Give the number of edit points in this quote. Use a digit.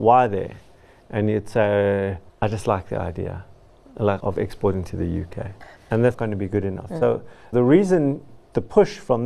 6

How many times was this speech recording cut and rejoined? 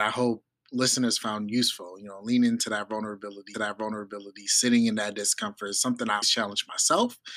2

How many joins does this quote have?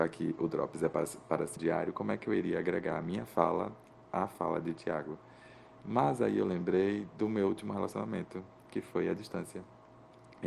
1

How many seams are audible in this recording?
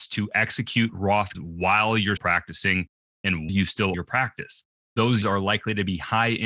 5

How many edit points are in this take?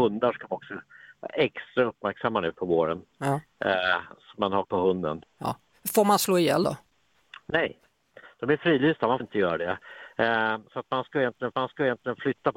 5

